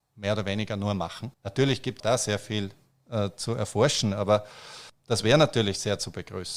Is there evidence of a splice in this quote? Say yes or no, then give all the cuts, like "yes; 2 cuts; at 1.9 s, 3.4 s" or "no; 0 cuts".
yes; 2 cuts; at 1.3 s, 2.0 s